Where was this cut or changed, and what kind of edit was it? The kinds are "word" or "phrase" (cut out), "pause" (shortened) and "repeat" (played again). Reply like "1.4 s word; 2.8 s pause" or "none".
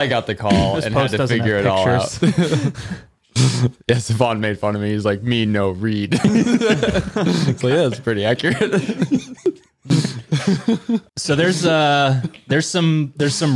11.1 s word